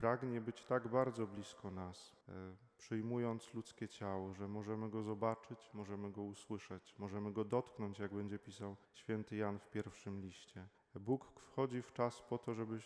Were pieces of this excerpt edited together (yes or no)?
yes